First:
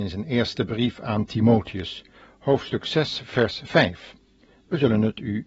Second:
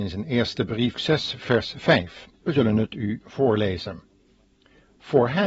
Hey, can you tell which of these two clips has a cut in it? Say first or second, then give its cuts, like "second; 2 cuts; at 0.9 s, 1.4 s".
second; 2 cuts; at 0.9 s, 2.3 s